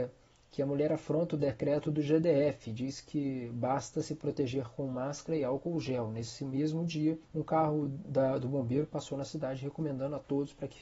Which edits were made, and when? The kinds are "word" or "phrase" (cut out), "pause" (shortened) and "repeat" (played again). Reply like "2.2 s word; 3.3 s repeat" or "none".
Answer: 7.3 s pause